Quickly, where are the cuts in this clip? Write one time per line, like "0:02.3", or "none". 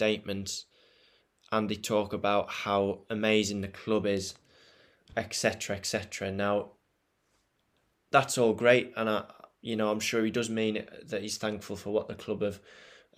none